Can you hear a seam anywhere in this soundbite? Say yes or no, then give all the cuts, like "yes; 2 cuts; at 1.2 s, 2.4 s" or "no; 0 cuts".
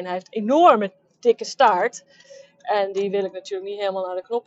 no; 0 cuts